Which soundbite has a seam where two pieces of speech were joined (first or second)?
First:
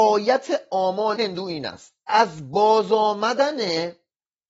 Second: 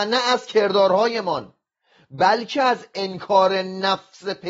first